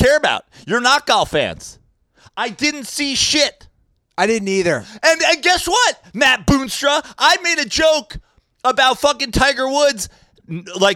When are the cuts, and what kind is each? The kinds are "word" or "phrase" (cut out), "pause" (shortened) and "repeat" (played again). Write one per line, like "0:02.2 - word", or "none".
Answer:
none